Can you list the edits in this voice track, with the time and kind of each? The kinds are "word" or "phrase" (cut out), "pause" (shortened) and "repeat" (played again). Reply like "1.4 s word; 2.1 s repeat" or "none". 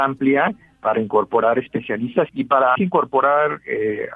2.3 s word; 2.8 s word